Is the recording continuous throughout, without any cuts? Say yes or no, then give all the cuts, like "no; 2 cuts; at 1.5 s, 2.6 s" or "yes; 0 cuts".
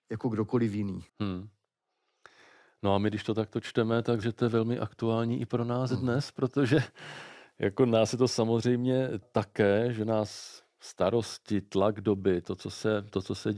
no; 3 cuts; at 1.1 s, 4.2 s, 9.2 s